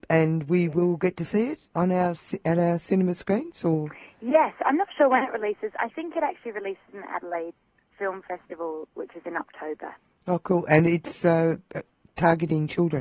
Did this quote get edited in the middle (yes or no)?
no